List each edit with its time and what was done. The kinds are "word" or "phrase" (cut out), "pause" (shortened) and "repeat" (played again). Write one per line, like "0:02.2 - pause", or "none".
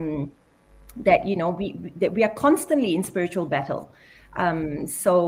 none